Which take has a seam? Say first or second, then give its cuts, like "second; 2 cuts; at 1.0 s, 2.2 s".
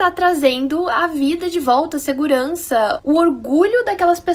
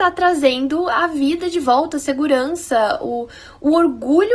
first; 1 cut; at 3.0 s